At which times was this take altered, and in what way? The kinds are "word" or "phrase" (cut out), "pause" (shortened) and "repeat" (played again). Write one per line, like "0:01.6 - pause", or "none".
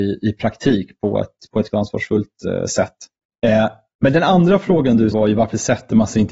0:01.7 - word
0:05.1 - word